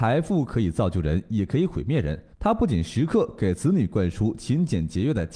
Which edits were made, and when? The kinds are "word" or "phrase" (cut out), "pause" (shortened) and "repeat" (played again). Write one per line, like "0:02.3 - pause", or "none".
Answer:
0:02.3 - pause